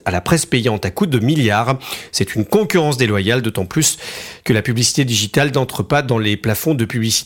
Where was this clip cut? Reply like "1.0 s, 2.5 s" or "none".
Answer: none